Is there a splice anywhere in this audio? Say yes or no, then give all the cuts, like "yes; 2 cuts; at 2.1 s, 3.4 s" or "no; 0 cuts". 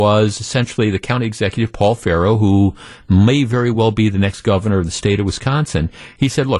no; 0 cuts